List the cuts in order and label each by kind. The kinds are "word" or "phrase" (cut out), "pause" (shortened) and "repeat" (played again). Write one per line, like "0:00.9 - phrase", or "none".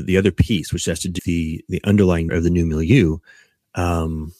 0:01.2 - word
0:01.7 - word
0:02.3 - word

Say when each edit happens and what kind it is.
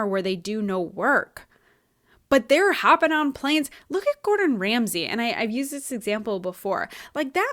none

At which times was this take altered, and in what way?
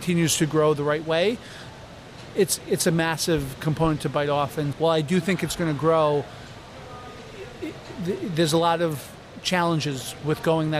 0:04.7 - word

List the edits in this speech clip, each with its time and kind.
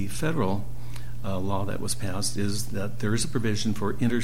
none

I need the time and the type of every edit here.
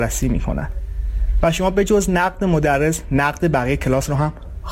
none

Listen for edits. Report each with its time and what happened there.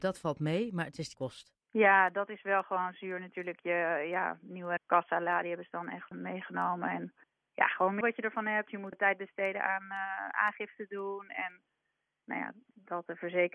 0:01.1 - phrase
0:01.6 - pause
0:04.8 - phrase
0:06.1 - word
0:07.2 - pause
0:08.0 - phrase
0:08.9 - phrase

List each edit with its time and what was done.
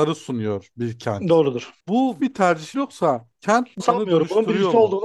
0:02.2 - word
0:02.7 - word
0:03.8 - word

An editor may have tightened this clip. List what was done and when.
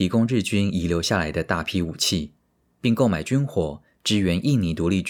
none

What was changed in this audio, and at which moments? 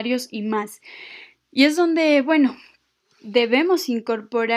none

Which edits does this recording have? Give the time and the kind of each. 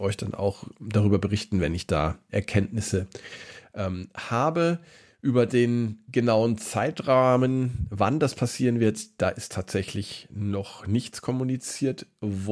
0:02.3 - word

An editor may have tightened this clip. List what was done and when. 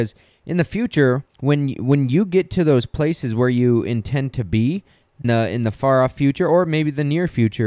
0:01.3 - pause
0:05.2 - word

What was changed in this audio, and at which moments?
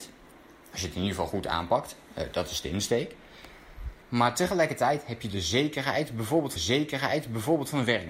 0:04.0 - pause
0:06.6 - repeat

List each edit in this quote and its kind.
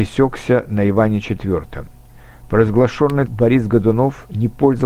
0:03.3 - word

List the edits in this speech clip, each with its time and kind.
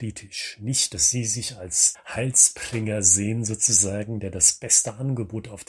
0:01.9 - word

